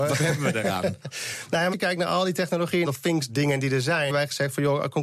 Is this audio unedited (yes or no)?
no